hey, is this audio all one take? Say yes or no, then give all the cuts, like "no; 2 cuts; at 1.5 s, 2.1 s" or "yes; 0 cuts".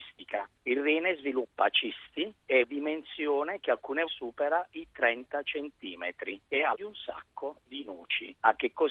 no; 3 cuts; at 2.6 s, 4.1 s, 6.7 s